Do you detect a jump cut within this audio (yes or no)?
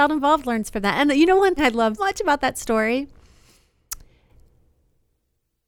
yes